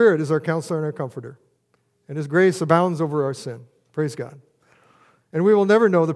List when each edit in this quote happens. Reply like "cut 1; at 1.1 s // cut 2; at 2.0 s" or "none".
none